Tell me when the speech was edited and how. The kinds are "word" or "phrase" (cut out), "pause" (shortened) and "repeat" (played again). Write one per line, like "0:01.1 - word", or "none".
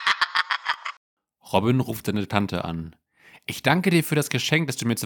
none